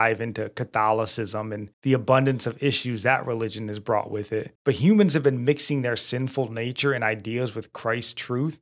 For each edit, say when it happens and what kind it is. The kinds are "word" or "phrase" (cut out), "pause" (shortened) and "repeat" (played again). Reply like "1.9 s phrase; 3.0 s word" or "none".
1.7 s pause; 4.6 s pause